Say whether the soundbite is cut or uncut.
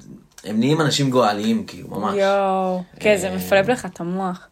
cut